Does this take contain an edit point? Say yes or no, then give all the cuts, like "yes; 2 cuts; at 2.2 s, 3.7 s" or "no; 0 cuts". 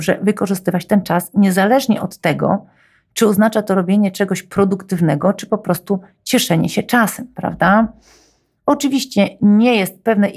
no; 0 cuts